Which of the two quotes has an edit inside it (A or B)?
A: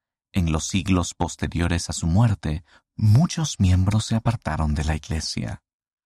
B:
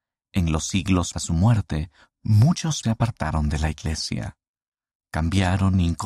B